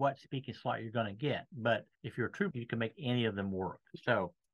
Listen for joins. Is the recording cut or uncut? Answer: cut